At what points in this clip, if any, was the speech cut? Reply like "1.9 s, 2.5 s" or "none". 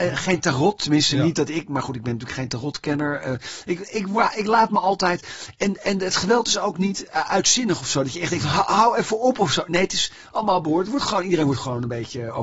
none